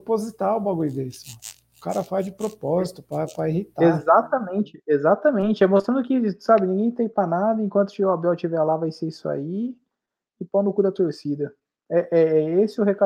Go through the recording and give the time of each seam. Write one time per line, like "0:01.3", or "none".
none